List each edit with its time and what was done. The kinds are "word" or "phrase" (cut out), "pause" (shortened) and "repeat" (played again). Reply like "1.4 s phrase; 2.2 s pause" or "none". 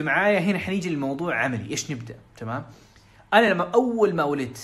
none